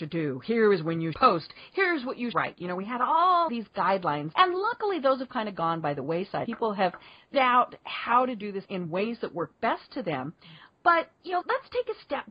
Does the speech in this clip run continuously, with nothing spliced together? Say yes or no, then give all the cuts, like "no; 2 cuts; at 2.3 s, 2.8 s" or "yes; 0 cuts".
no; 8 cuts; at 1.1 s, 2.3 s, 3.5 s, 4.3 s, 6.5 s, 7.3 s, 8.6 s, 11.4 s